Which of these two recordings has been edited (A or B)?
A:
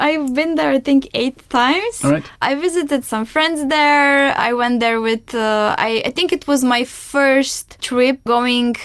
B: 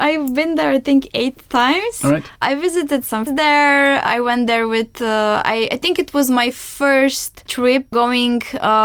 B